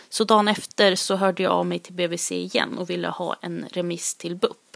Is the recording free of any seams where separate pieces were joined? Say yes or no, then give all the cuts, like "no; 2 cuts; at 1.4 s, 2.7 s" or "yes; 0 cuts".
yes; 0 cuts